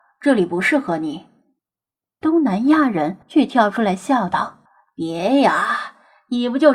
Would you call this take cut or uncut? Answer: cut